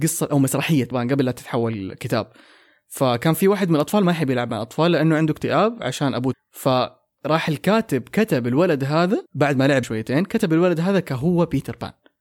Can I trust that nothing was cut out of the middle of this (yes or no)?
no